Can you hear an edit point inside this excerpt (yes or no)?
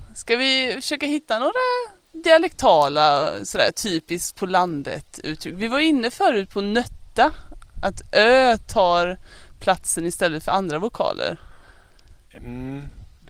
no